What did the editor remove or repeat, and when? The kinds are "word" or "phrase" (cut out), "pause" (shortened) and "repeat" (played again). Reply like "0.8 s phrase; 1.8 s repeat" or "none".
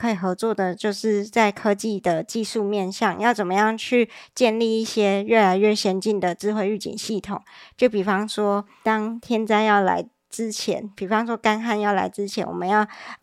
none